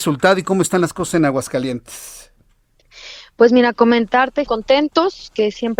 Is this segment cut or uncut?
cut